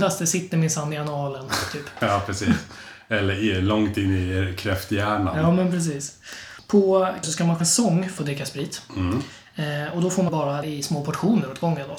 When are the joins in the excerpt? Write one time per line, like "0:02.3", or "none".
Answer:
0:07.2
0:07.6
0:08.2
0:10.3
0:10.6